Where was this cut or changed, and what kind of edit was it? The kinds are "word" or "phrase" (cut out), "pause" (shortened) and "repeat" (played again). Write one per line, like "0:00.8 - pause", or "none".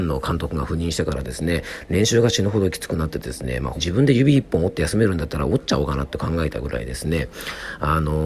0:03.7 - phrase